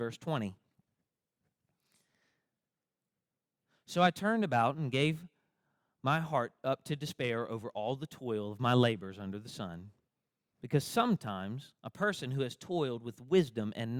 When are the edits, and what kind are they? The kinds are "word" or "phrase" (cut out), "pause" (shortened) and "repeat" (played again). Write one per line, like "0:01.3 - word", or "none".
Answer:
0:11.8 - pause